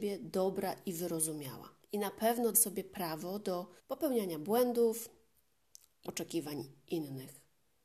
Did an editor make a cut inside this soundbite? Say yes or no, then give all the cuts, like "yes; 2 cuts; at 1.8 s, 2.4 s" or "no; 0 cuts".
yes; 4 cuts; at 1.8 s, 2.5 s, 3.8 s, 6.0 s